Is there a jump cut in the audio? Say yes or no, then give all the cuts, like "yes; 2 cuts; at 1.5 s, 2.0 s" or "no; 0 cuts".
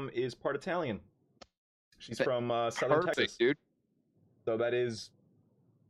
no; 0 cuts